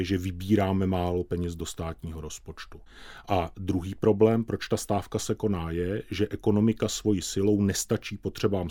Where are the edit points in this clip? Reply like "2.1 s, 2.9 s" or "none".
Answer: none